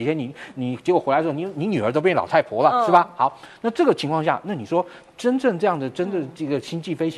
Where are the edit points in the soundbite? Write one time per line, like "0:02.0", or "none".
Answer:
none